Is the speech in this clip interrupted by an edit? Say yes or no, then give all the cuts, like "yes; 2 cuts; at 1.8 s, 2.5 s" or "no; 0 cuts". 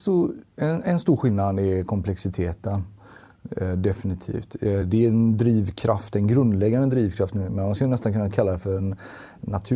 no; 0 cuts